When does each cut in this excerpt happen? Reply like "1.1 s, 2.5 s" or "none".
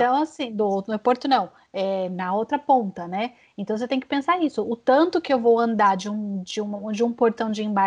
none